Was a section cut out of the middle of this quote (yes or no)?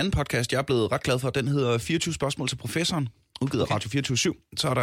no